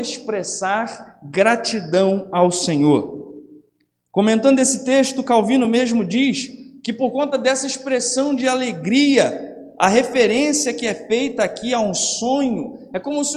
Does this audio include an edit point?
no; 0 cuts

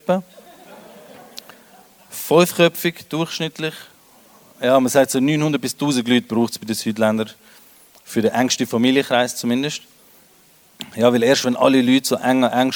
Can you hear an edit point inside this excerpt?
no; 0 cuts

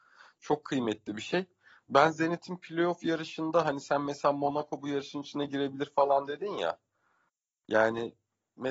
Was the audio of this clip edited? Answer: no; 0 cuts

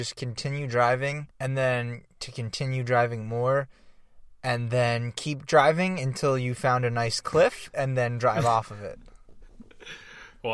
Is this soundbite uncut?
no; 1 cut; at 1.3 s

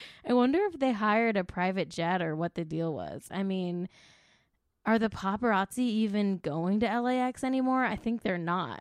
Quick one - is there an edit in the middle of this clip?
no; 0 cuts

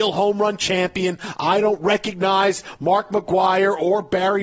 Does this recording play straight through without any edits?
yes; 0 cuts

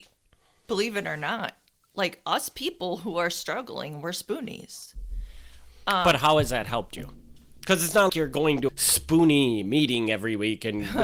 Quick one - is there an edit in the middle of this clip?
yes; 2 cuts; at 8.1 s, 8.7 s

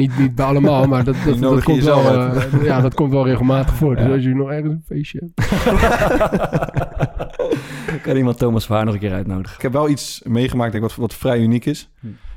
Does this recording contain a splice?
no; 0 cuts

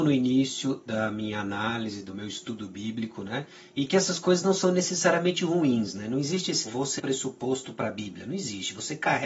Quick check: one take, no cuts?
no; 2 cuts; at 6.7 s, 7.0 s

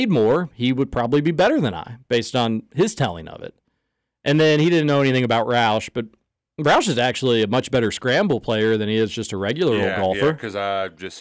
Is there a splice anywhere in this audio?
no; 0 cuts

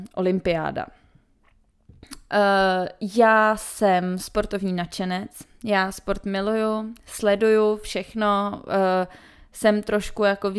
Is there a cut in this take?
no; 0 cuts

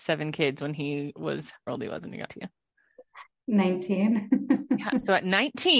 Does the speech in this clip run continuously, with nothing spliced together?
no; 2 cuts; at 1.7 s, 2.3 s

